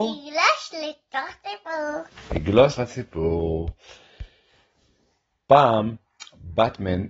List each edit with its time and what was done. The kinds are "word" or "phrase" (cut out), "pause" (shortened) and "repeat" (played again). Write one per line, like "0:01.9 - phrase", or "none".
0:02.8 - word